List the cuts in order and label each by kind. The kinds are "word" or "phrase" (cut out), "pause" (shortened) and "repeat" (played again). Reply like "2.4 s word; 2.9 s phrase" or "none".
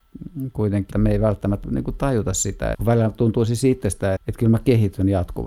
0.9 s word; 1.6 s word; 2.7 s word; 4.2 s word